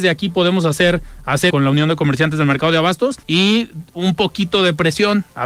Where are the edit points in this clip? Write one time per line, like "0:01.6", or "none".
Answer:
0:01.5
0:03.2